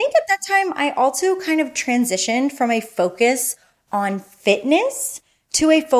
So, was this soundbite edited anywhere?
no; 0 cuts

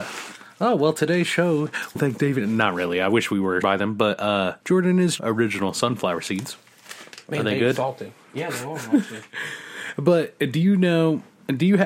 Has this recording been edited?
yes; 6 cuts; at 1.9 s, 3.6 s, 4.6 s, 5.2 s, 7.2 s, 9.3 s

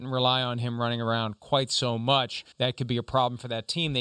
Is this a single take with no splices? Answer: no; 1 cut; at 2.5 s

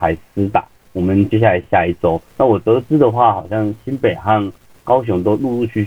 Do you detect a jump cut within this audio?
yes; 1 cut; at 2.3 s

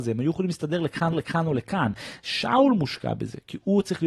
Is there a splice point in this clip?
yes; 1 cut; at 1.1 s

